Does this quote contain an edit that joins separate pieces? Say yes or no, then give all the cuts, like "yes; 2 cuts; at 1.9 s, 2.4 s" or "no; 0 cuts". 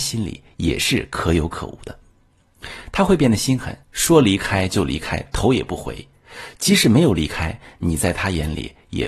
yes; 1 cut; at 3.8 s